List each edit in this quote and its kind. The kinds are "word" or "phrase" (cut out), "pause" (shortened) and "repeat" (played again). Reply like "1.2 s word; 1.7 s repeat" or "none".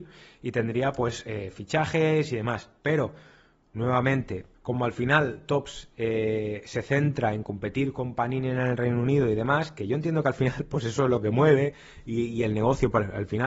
2.8 s pause; 4.5 s pause